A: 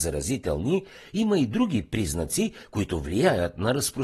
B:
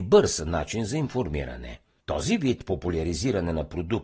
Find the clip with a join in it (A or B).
B